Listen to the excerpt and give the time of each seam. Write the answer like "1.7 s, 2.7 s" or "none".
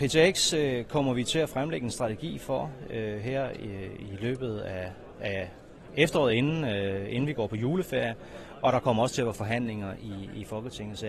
none